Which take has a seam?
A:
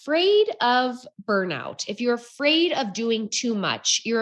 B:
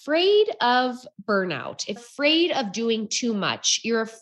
B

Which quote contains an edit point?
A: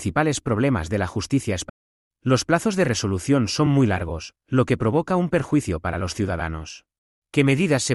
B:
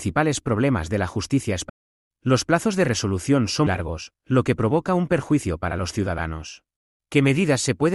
B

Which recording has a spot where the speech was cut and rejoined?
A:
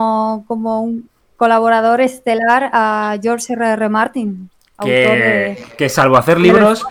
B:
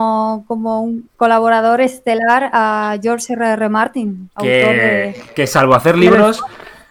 B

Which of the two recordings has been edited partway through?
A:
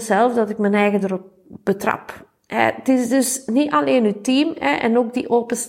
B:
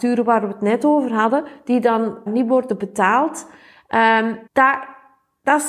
B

